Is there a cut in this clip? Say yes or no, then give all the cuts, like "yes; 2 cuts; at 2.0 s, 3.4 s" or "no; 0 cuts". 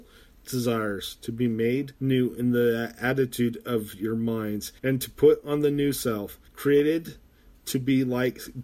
yes; 3 cuts; at 2.0 s, 4.8 s, 6.5 s